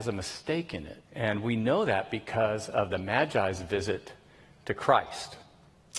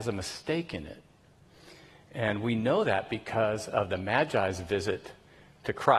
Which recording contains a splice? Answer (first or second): first